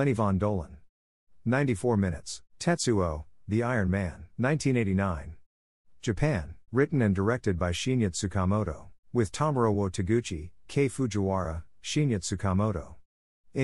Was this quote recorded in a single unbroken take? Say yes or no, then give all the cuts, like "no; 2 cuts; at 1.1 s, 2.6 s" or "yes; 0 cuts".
no; 4 cuts; at 2.5 s, 4.3 s, 6.7 s, 9.0 s